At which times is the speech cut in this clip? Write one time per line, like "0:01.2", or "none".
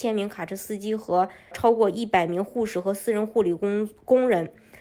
0:01.5